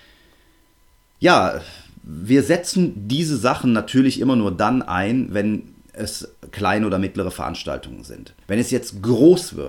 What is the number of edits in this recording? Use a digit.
1